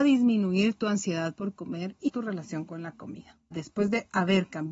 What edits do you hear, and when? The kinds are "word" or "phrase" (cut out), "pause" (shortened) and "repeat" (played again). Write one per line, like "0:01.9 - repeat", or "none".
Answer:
0:02.1 - word
0:03.5 - word